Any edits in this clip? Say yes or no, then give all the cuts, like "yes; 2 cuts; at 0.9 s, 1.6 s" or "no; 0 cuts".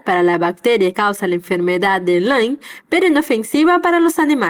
yes; 1 cut; at 0.9 s